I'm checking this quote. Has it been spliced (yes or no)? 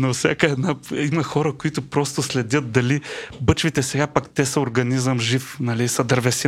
no